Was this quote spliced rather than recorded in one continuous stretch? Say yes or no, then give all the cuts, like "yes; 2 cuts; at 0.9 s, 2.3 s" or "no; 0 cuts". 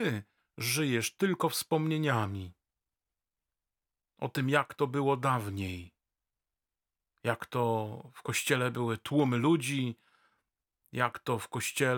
no; 0 cuts